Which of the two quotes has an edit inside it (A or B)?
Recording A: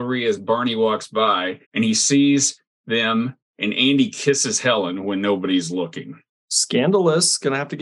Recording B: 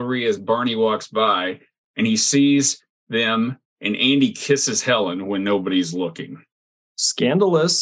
A